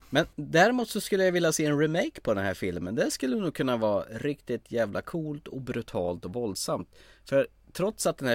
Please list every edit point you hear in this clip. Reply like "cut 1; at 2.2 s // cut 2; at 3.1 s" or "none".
none